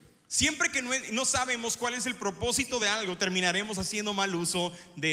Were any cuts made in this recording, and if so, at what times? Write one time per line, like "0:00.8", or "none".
none